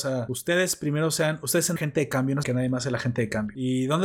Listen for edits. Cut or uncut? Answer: cut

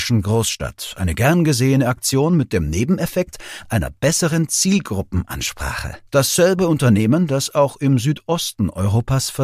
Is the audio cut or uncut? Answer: cut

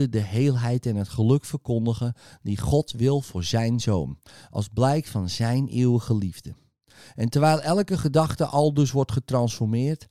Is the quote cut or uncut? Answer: uncut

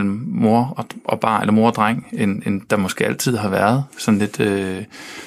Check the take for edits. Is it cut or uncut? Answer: uncut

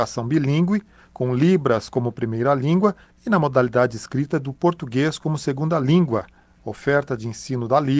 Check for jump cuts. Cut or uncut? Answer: uncut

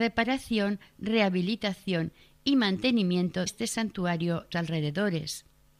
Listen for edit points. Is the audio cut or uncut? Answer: cut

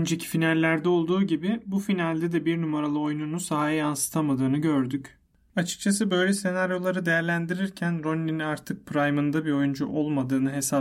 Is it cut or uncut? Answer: uncut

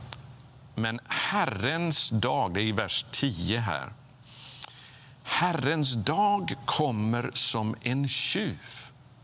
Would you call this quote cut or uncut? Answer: uncut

